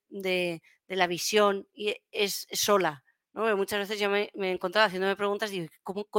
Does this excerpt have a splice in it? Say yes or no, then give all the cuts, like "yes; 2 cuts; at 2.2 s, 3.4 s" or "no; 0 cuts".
no; 0 cuts